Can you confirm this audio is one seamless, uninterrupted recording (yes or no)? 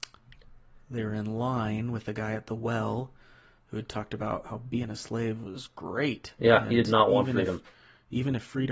yes